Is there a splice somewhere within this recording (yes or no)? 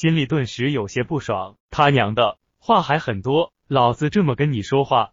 yes